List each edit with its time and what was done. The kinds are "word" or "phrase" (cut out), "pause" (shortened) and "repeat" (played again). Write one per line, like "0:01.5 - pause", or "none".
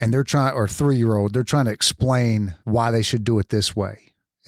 0:02.6 - pause